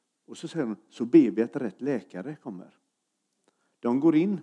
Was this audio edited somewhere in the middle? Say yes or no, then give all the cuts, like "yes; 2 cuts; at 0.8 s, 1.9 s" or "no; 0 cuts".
no; 0 cuts